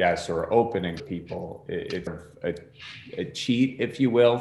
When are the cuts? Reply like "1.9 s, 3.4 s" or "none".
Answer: 1.0 s, 2.1 s